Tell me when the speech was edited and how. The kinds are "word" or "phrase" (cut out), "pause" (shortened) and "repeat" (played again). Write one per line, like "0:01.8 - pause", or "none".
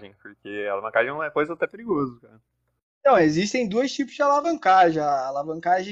none